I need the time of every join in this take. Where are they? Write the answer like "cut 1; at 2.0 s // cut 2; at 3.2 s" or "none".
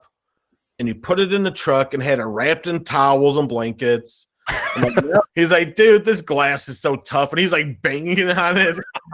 cut 1; at 5.3 s